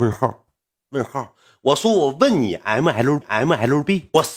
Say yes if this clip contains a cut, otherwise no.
yes